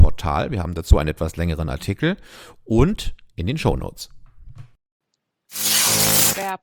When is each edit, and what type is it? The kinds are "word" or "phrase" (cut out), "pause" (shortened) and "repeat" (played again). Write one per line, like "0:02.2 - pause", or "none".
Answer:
none